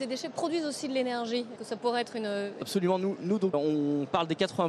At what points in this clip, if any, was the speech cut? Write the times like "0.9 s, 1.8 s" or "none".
1.6 s, 2.6 s, 3.5 s